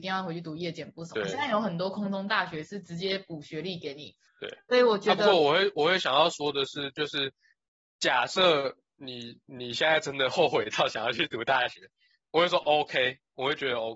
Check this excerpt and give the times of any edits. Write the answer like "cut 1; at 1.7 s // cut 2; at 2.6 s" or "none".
none